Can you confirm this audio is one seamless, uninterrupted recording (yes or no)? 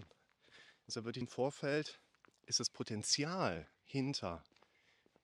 no